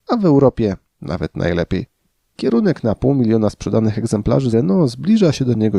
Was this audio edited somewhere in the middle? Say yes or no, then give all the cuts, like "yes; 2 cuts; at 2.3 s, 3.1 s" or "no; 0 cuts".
yes; 1 cut; at 4.5 s